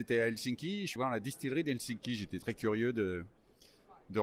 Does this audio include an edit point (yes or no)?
yes